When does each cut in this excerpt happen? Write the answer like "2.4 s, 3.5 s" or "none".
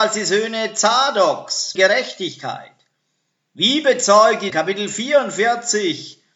1.7 s, 4.5 s